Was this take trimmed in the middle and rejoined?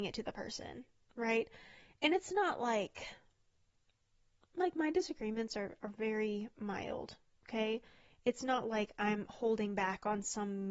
no; 0 cuts

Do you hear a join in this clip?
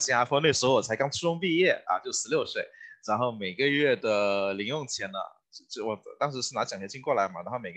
no; 0 cuts

